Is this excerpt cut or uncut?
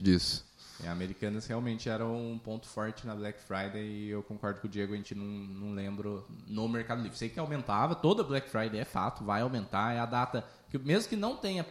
uncut